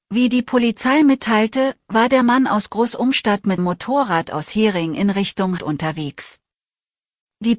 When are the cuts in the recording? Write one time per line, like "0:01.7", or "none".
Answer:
0:03.6
0:05.6